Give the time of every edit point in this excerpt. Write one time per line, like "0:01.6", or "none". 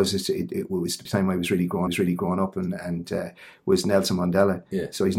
0:01.1
0:01.9